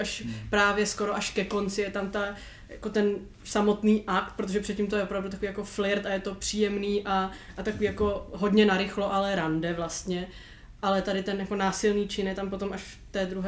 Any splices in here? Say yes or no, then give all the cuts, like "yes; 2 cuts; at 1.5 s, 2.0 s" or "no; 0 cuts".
no; 0 cuts